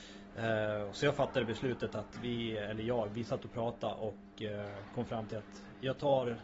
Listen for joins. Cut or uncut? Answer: uncut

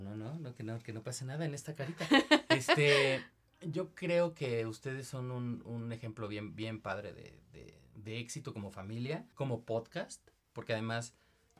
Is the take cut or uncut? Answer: cut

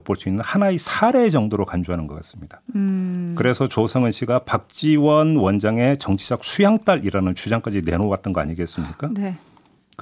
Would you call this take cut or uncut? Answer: uncut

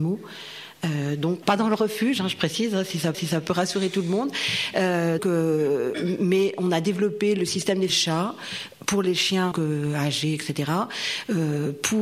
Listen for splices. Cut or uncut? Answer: cut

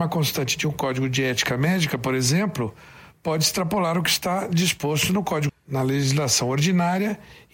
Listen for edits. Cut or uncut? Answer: cut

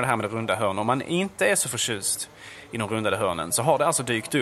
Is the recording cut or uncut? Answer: uncut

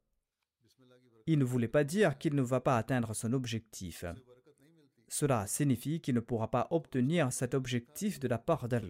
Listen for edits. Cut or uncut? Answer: uncut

